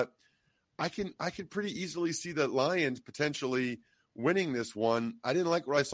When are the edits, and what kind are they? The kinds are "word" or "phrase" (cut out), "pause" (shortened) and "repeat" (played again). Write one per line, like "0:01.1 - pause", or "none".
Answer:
none